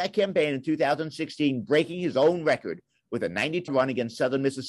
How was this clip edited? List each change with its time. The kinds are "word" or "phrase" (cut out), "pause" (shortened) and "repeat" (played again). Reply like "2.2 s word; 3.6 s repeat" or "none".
3.7 s word